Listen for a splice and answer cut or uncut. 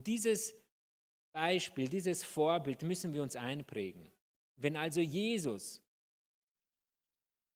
uncut